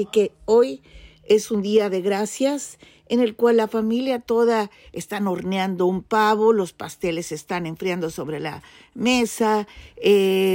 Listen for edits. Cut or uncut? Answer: uncut